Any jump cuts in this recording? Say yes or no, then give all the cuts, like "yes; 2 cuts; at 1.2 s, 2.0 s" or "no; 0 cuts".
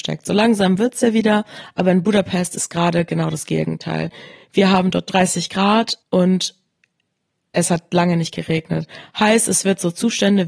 yes; 1 cut; at 6.0 s